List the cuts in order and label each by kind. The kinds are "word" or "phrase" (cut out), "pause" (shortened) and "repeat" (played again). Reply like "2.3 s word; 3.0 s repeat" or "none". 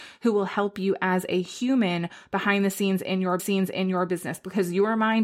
3.4 s repeat